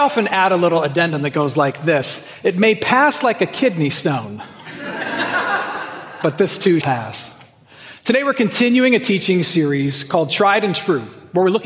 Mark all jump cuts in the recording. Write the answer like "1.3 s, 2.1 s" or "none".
6.8 s